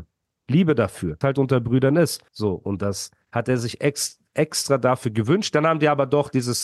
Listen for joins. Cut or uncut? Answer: cut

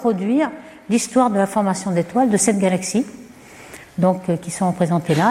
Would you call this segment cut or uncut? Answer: uncut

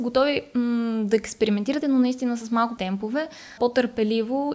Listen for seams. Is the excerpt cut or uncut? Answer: cut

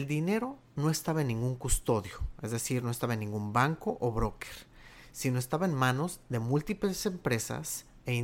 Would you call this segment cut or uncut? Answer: uncut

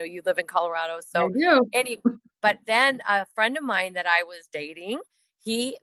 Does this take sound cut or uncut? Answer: uncut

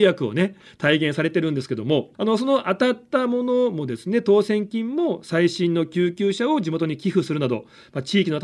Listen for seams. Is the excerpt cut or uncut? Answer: cut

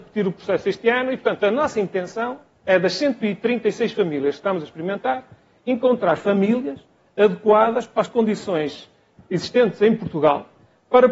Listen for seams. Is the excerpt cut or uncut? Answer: uncut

